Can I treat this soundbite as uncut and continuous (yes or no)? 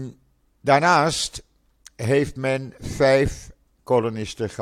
no